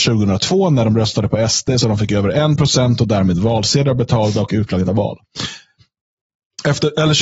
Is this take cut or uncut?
cut